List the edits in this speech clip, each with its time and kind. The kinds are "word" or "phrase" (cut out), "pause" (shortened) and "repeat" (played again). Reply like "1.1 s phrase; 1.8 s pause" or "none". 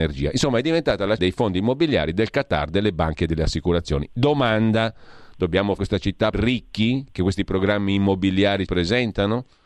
1.2 s word; 5.8 s word; 6.3 s word; 8.7 s word